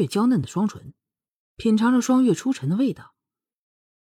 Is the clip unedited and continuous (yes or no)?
yes